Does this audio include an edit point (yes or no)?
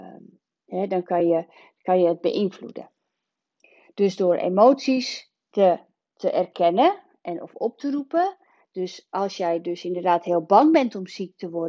no